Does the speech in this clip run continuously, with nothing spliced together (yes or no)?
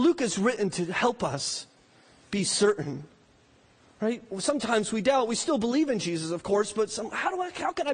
yes